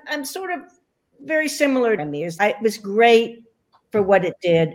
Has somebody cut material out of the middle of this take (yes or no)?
yes